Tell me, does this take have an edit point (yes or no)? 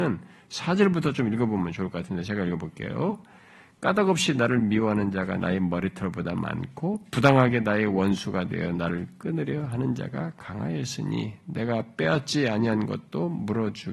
no